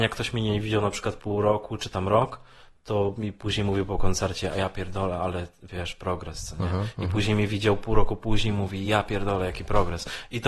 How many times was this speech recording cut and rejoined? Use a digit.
0